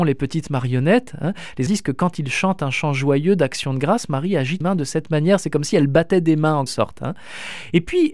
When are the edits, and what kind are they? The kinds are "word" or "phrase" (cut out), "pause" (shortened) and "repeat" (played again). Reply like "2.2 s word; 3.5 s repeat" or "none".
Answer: 1.7 s word; 4.6 s word; 6.7 s word